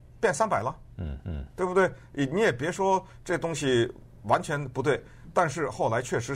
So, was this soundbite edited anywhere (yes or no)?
yes